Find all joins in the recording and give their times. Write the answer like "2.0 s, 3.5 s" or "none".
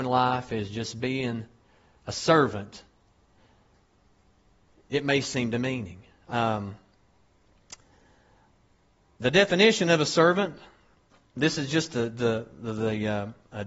none